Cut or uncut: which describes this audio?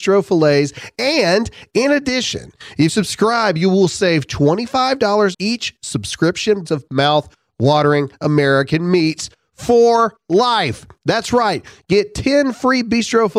cut